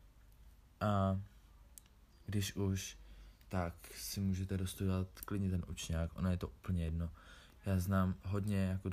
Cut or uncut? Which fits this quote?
uncut